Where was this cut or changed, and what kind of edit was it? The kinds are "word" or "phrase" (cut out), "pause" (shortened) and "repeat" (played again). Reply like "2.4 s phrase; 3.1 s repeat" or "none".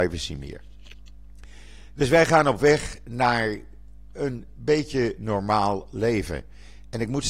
none